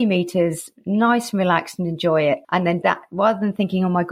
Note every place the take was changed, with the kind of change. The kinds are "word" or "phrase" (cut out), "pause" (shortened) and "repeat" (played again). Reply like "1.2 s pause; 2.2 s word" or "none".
2.4 s pause; 2.8 s phrase